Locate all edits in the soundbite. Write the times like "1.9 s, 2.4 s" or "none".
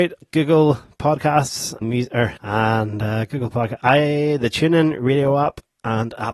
1.8 s, 2.4 s